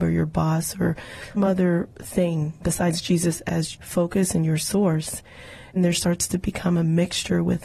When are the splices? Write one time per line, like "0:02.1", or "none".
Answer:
0:01.4
0:02.6
0:03.7
0:05.8